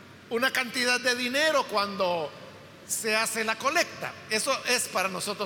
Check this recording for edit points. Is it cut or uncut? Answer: uncut